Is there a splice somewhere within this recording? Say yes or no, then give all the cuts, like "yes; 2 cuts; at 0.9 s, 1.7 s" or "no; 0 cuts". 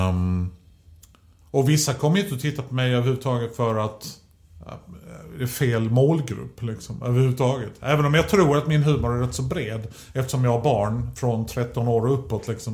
no; 0 cuts